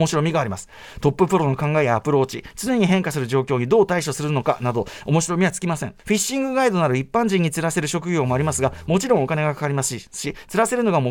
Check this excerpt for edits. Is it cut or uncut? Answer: cut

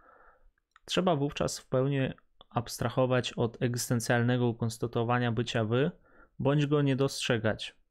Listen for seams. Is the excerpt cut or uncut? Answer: uncut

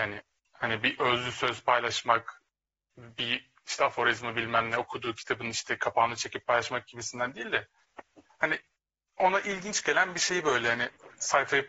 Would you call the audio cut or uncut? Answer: uncut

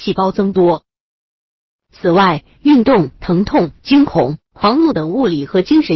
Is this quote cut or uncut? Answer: cut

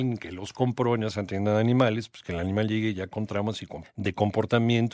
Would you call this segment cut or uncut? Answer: cut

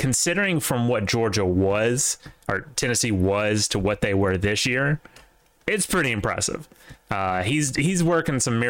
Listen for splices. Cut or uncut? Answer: uncut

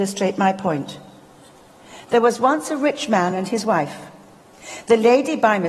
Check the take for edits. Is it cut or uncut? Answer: uncut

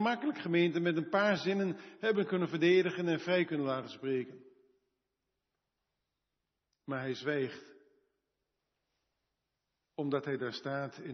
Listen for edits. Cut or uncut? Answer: uncut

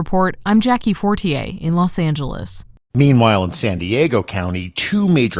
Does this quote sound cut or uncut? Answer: uncut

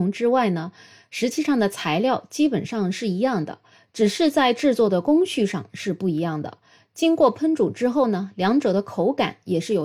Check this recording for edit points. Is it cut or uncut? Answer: uncut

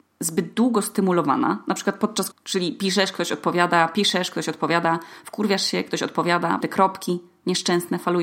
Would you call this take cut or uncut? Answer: cut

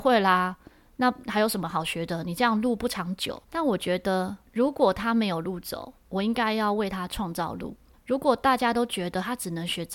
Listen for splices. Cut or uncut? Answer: cut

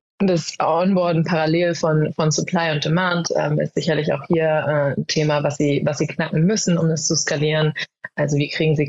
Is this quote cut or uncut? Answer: uncut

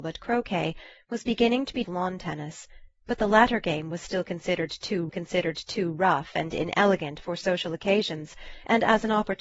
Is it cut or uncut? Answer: cut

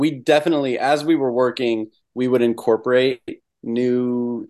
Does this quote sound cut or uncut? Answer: uncut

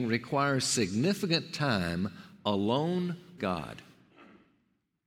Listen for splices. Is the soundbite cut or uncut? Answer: cut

